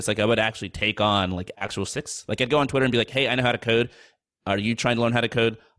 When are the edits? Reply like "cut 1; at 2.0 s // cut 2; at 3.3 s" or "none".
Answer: cut 1; at 1.9 s